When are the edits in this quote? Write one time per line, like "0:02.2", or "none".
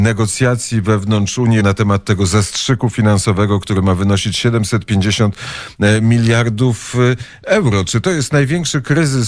0:01.6